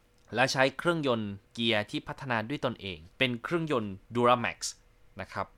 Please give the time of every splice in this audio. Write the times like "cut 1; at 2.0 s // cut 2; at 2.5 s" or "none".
cut 1; at 1.5 s // cut 2; at 3.1 s